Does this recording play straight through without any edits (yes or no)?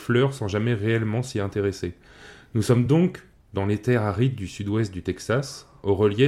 yes